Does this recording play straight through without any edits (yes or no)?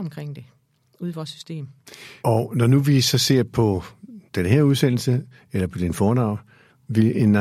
no